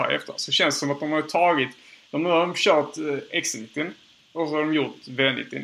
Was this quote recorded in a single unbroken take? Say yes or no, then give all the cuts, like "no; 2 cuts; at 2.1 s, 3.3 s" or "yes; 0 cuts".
yes; 0 cuts